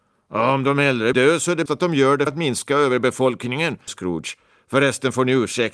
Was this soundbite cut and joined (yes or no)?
yes